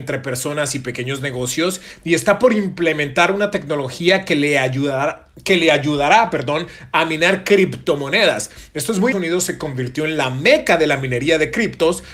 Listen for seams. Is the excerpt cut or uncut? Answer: cut